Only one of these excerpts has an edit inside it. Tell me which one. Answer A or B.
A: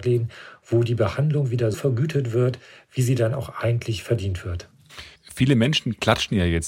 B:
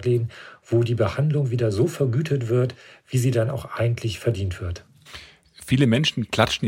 A